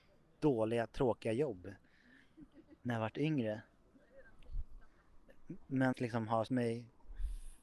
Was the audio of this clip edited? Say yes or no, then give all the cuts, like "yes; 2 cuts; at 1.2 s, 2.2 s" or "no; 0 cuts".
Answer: yes; 3 cuts; at 2.8 s, 5.9 s, 6.5 s